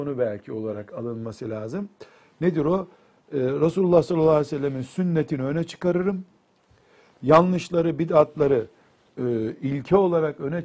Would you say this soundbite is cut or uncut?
uncut